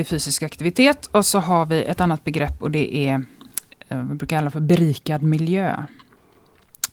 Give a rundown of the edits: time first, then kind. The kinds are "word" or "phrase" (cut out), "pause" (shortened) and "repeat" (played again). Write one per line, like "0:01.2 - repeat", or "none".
none